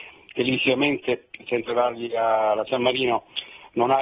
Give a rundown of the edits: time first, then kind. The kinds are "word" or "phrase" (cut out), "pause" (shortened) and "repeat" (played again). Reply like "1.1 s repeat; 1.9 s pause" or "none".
1.7 s word; 2.7 s word